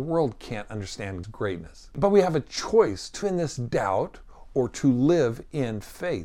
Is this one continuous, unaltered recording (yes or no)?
no